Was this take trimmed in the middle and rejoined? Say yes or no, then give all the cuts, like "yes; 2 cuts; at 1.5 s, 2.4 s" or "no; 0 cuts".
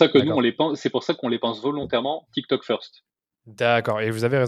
no; 0 cuts